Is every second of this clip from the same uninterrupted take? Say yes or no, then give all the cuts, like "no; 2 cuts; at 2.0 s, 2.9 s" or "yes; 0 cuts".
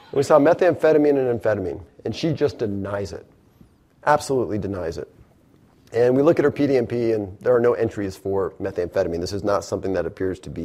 yes; 0 cuts